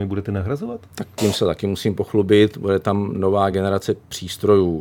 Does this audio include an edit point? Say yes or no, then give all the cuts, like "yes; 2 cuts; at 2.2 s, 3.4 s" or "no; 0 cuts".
no; 0 cuts